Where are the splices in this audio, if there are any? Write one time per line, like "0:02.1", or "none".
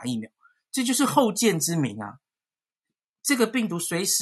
none